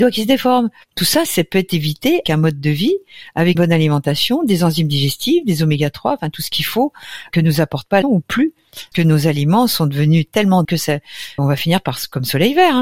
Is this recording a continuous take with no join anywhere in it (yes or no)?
no